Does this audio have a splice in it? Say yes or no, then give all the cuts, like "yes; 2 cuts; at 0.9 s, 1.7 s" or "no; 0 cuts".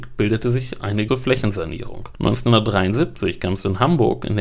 yes; 1 cut; at 1.1 s